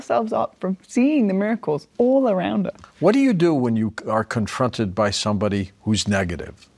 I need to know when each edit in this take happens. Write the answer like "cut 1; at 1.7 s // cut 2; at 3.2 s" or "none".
cut 1; at 1.9 s